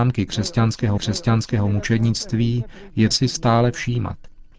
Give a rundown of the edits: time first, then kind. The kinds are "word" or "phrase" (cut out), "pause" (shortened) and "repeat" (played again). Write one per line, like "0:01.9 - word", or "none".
0:01.0 - repeat
0:03.1 - word